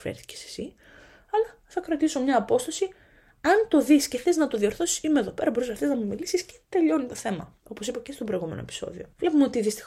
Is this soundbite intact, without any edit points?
yes; 0 cuts

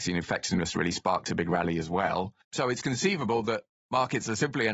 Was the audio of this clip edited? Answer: yes; 1 cut; at 2.4 s

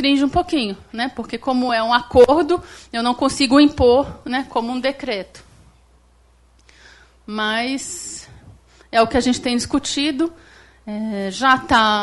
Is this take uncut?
yes; 0 cuts

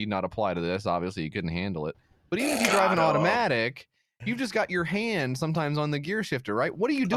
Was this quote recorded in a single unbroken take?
yes; 0 cuts

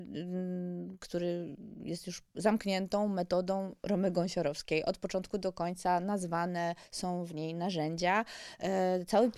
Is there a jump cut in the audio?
yes; 1 cut; at 2.3 s

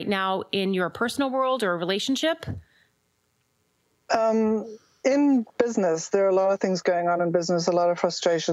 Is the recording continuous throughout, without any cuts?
yes; 0 cuts

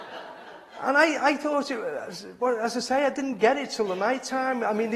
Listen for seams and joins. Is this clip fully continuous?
no; 1 cut; at 2.4 s

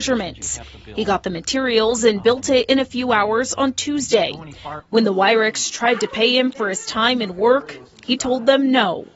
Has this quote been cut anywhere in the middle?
no; 0 cuts

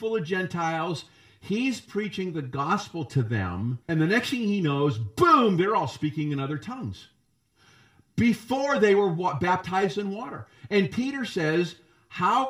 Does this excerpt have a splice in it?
yes; 1 cut; at 3.8 s

